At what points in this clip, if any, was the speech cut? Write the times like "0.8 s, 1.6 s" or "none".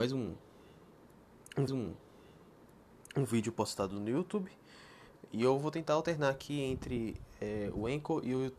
1.7 s